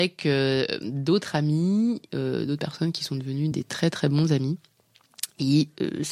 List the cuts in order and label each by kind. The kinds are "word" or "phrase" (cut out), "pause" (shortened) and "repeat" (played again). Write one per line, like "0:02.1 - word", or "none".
0:02.1 - word
0:03.5 - word